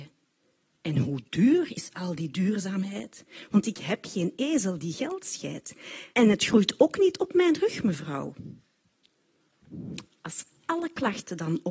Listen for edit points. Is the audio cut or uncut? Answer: cut